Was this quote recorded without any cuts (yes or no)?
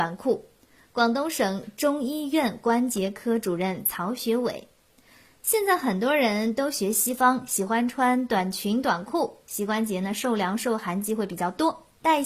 yes